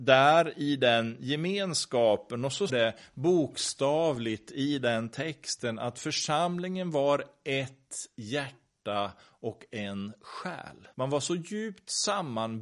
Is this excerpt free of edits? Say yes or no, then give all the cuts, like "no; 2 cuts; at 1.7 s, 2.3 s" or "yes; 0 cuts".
no; 2 cuts; at 2.7 s, 10.9 s